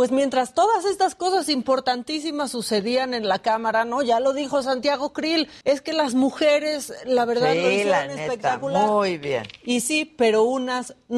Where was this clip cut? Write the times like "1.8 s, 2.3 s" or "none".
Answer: 5.6 s